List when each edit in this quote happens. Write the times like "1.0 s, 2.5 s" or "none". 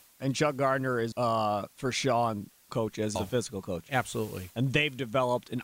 1.1 s, 1.7 s, 2.7 s, 3.2 s